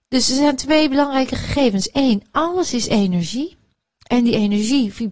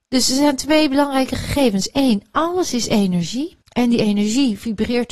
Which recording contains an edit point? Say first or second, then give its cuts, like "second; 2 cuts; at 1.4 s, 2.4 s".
second; 1 cut; at 3.6 s